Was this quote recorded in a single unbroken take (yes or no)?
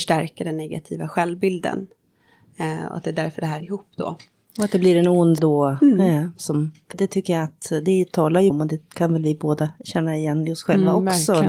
no